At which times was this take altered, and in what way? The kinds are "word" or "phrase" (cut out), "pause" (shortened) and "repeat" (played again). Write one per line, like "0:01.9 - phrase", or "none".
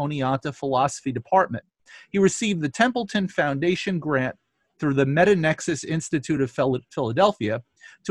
none